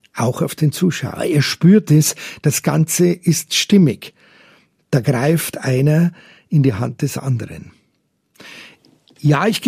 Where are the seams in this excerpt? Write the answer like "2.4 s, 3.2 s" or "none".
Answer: none